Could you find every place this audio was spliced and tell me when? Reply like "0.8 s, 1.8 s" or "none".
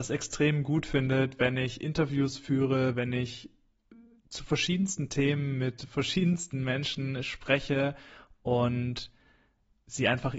none